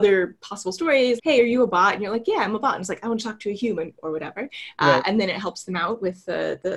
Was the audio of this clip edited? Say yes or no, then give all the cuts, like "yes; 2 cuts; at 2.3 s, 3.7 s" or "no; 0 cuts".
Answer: yes; 1 cut; at 1.2 s